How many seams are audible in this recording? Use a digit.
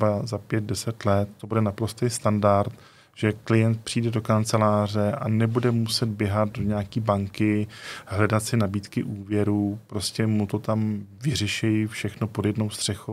0